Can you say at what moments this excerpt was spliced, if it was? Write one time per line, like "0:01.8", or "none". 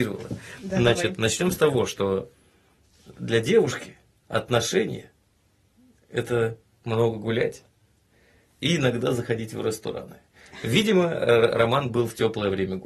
none